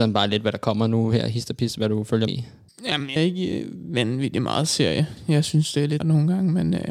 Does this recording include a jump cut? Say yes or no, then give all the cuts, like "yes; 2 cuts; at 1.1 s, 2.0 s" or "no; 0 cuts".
yes; 3 cuts; at 2.3 s, 3.2 s, 6.0 s